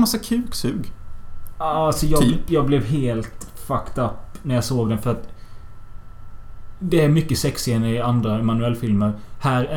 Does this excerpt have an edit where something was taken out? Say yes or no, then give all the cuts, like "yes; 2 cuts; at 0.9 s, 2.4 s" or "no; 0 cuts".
no; 0 cuts